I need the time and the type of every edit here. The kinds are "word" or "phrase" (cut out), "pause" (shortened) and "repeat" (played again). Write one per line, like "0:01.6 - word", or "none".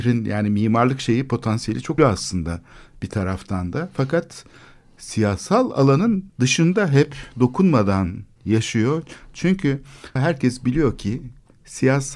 0:02.0 - word
0:06.3 - pause
0:10.2 - word